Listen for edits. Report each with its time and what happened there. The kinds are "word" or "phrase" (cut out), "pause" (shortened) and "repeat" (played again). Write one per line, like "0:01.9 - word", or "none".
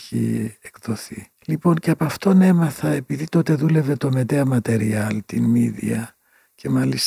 0:01.3 - pause